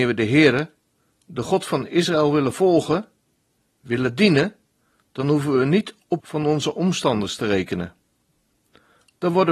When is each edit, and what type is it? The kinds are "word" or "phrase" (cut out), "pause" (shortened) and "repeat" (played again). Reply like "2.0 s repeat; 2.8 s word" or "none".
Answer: 6.2 s word